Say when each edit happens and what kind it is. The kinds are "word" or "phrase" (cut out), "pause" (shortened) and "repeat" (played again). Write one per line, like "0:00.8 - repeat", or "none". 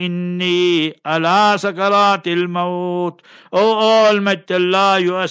none

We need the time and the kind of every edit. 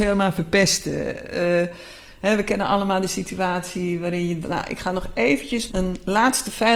0:04.4 - word
0:05.7 - word

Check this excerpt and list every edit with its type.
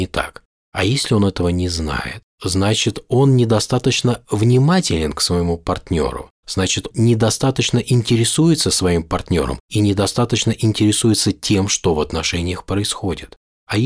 0:06.9 - word

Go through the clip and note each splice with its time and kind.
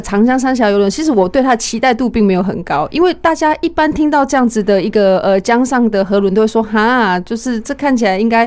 none

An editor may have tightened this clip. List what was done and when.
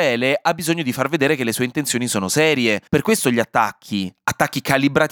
0:02.9 - pause

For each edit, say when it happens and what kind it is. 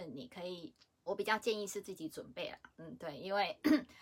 0:01.1 - word

